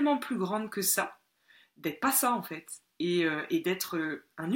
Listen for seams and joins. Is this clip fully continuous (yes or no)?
yes